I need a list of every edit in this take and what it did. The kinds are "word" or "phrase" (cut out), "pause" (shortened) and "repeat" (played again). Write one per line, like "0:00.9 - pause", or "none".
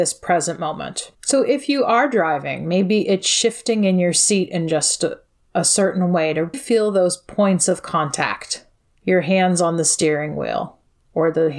0:01.1 - pause
0:06.5 - word